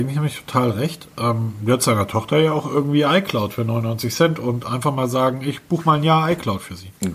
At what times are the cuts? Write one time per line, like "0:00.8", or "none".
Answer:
none